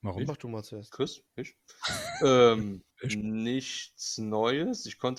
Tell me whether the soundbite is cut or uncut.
cut